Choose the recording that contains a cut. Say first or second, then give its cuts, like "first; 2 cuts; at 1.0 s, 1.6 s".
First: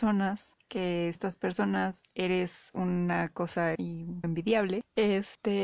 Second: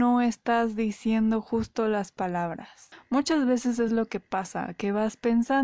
first; 3 cuts; at 1.2 s, 3.8 s, 4.2 s